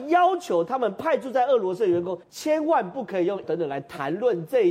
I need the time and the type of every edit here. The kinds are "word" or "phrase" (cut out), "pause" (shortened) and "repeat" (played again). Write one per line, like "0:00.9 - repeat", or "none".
0:02.2 - pause
0:03.4 - word